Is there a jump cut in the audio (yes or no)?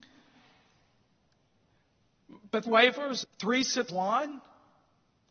yes